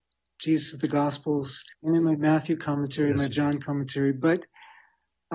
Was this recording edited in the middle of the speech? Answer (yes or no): yes